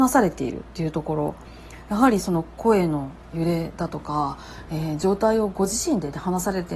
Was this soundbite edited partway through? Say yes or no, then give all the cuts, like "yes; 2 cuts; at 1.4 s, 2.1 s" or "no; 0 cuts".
no; 0 cuts